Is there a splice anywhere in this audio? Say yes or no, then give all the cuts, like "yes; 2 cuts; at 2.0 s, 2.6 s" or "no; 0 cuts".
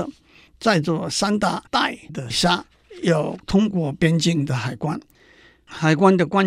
no; 0 cuts